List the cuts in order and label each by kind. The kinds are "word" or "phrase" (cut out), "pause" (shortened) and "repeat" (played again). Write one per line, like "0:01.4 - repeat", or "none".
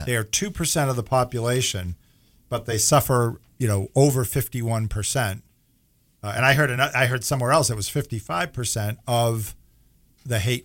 none